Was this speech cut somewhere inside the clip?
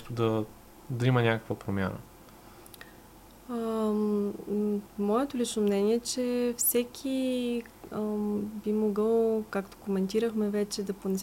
no; 0 cuts

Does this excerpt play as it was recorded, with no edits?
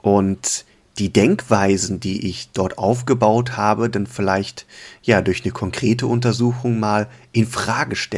yes; 0 cuts

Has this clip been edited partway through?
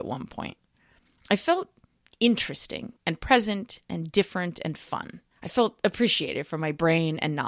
yes; 2 cuts; at 3.0 s, 5.3 s

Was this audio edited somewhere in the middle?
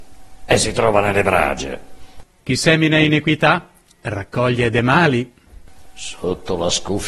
no; 0 cuts

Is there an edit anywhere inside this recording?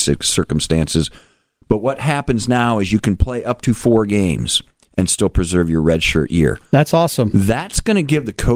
no; 0 cuts

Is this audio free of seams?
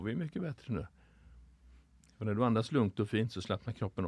yes; 0 cuts

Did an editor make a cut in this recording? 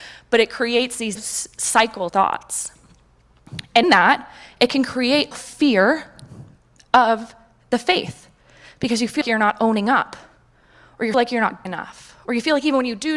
yes; 7 cuts; at 1.2 s, 2.1 s, 3.8 s, 5.3 s, 9.2 s, 11.1 s, 11.7 s

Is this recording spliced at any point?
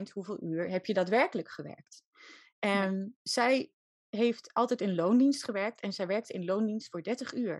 yes; 1 cut; at 3.1 s

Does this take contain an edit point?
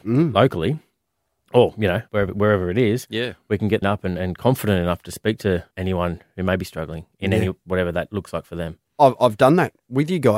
yes; 3 cuts; at 2.1 s, 3.8 s, 5.7 s

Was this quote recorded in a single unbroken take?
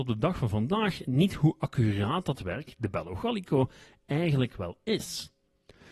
yes; 0 cuts

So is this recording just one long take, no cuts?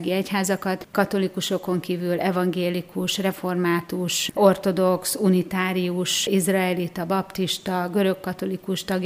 yes; 0 cuts

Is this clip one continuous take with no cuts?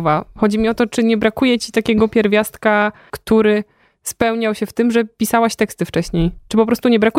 yes; 0 cuts

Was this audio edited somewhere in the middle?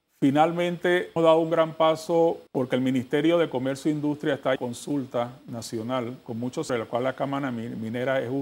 yes; 4 cuts; at 1.2 s, 2.5 s, 4.6 s, 6.7 s

